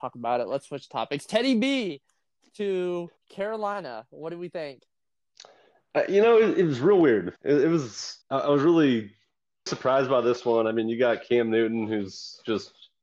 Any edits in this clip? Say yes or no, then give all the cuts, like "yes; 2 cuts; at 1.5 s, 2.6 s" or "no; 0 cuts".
yes; 4 cuts; at 3.2 s, 7.4 s, 8.2 s, 9.7 s